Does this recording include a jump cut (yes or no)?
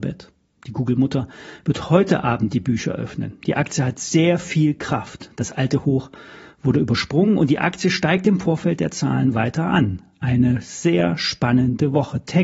no